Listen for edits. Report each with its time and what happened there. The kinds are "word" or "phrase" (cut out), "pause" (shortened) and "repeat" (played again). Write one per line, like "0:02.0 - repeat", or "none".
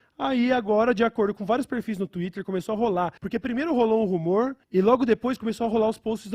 0:03.2 - pause
0:04.6 - pause